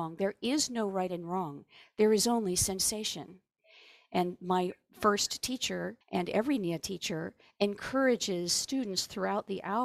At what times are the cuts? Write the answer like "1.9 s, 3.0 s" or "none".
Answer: 6.0 s